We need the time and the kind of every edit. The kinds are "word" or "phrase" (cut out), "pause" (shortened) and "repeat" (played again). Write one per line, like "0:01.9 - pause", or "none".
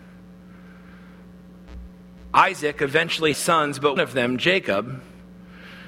0:03.3 - word
0:04.0 - word